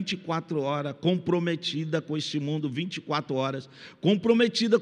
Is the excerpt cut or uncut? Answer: uncut